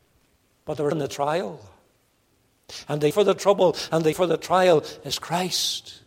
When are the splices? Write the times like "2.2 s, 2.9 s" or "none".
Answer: 0.9 s, 3.1 s, 4.1 s